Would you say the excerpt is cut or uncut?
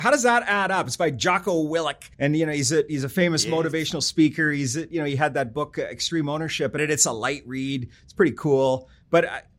cut